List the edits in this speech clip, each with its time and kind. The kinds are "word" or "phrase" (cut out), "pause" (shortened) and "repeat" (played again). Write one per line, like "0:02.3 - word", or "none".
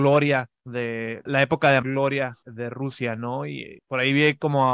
0:01.3 - word
0:01.8 - word
0:02.4 - word